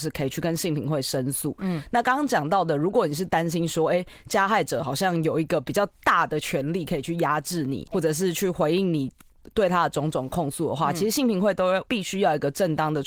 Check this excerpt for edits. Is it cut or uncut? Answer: cut